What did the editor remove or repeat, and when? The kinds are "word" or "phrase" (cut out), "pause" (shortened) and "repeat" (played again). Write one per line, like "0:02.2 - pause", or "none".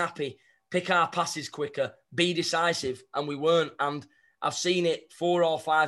none